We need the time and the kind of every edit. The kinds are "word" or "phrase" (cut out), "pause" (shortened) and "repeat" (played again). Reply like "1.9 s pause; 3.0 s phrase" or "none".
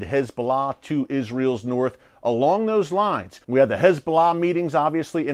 3.4 s pause